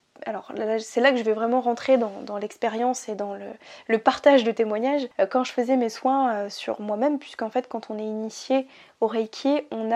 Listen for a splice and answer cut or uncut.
uncut